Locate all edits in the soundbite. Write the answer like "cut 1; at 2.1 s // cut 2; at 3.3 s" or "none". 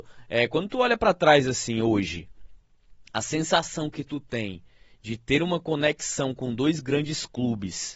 none